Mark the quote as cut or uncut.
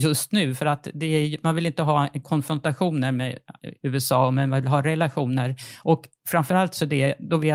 cut